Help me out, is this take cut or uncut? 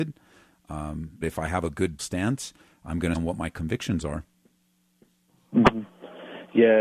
cut